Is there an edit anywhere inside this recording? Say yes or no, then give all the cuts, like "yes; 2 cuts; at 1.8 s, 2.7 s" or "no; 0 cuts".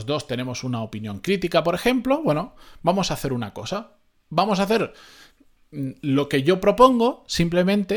no; 0 cuts